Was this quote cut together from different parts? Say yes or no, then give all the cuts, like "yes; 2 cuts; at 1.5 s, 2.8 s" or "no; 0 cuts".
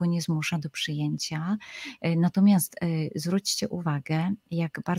no; 0 cuts